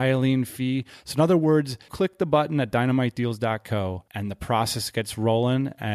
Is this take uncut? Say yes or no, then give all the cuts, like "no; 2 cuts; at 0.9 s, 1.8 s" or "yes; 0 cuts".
no; 2 cuts; at 1.9 s, 4.1 s